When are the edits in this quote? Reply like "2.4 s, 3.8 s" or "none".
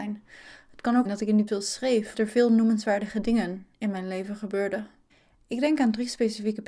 1.0 s, 1.5 s, 2.1 s, 3.7 s, 5.1 s